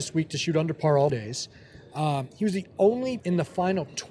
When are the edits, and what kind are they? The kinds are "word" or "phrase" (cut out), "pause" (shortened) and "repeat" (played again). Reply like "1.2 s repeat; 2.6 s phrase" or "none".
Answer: 1.1 s word; 3.2 s word